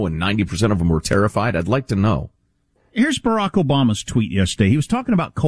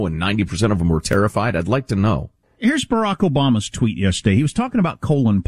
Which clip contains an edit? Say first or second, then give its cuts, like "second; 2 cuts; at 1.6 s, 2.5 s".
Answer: second; 1 cut; at 2.4 s